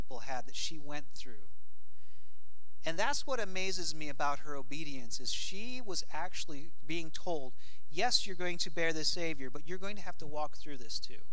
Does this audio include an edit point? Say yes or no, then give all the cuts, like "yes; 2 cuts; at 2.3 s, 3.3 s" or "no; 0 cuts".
no; 0 cuts